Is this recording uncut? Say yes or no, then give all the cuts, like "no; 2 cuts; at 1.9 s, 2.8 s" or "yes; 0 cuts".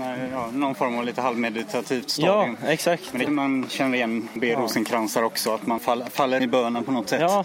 no; 5 cuts; at 1.0 s, 3.3 s, 4.4 s, 5.8 s, 6.4 s